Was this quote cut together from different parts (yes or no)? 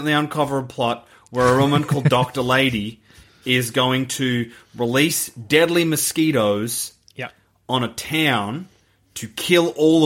no